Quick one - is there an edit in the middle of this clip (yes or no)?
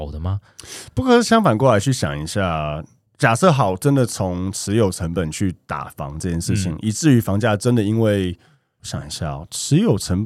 no